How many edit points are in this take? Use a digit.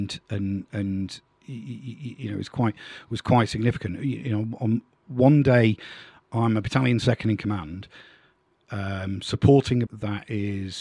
1